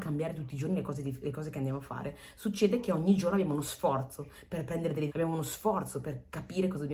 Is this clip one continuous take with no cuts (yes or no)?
no